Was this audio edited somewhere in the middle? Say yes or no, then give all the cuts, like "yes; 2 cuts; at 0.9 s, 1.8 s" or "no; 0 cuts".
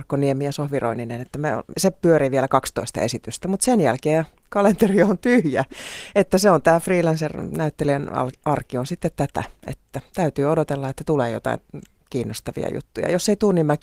yes; 1 cut; at 1.7 s